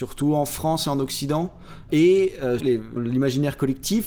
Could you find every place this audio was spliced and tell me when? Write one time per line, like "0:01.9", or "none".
0:02.6
0:03.0